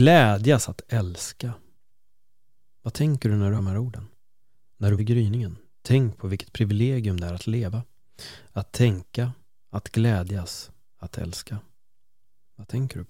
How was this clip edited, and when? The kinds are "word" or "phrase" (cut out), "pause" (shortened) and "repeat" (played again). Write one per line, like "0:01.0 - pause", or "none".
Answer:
0:03.6 - word
0:05.0 - word